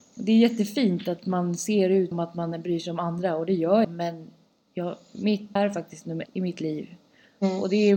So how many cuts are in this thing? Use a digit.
4